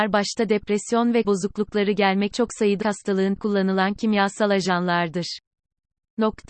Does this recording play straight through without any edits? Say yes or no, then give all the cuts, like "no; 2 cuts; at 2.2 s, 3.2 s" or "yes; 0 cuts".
no; 4 cuts; at 1.2 s, 2.3 s, 2.8 s, 3.4 s